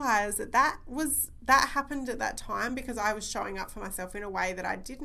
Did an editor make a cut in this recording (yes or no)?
no